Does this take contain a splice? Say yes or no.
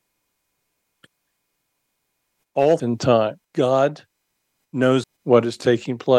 yes